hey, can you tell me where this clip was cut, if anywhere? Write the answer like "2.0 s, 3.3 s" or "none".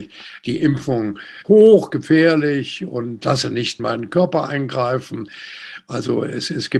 1.4 s, 3.2 s, 3.8 s